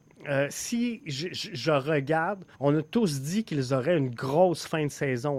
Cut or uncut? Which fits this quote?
cut